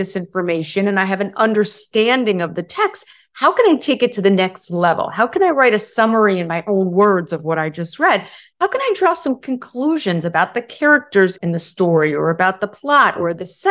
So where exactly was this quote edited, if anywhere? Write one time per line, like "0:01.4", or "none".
none